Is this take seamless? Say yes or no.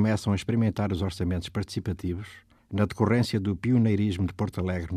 no